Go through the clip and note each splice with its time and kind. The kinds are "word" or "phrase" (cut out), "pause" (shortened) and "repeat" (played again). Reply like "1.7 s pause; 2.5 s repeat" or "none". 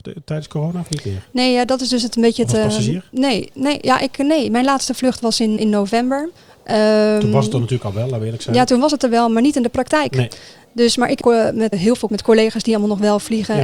5.6 s word; 11.2 s word; 11.7 s word; 12.1 s word